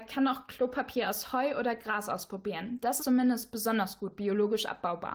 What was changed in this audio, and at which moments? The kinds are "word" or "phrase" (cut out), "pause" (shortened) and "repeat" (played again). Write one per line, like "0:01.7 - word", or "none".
0:03.0 - word

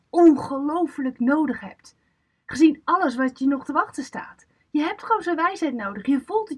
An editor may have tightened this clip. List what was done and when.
none

